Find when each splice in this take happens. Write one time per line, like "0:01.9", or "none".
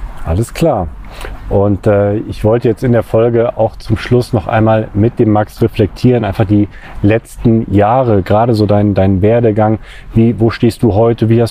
none